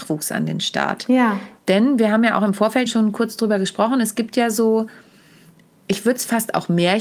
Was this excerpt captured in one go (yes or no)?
no